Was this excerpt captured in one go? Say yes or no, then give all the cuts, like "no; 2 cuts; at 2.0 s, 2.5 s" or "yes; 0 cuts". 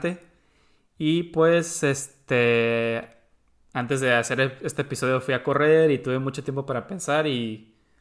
yes; 0 cuts